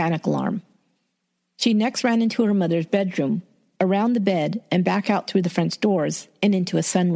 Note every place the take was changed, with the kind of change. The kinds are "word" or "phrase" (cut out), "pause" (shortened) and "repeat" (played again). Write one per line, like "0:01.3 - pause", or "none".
none